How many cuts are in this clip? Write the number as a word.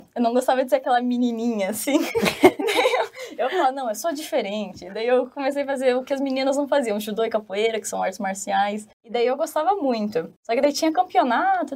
two